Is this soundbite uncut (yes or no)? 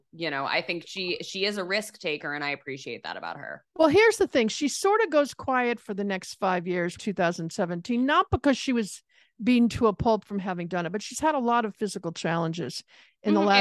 no